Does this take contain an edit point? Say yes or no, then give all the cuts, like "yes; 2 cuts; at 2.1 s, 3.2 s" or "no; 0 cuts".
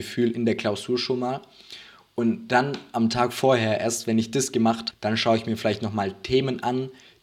yes; 1 cut; at 4.9 s